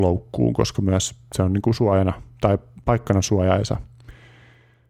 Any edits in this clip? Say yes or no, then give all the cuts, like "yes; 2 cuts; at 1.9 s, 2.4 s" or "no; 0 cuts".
no; 0 cuts